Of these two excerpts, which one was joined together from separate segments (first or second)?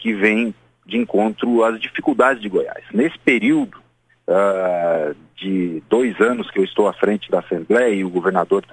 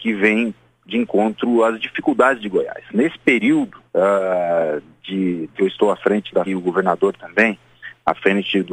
second